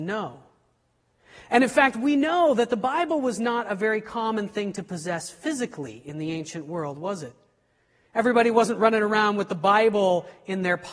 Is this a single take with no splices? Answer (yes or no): yes